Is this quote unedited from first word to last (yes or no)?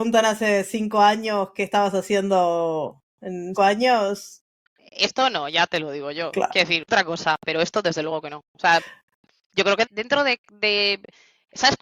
no